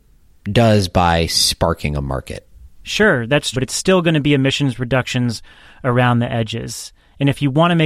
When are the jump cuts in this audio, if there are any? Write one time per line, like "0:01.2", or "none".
0:03.5